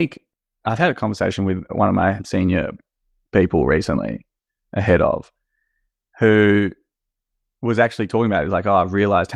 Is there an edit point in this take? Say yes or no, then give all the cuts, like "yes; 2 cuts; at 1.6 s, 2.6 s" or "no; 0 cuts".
no; 0 cuts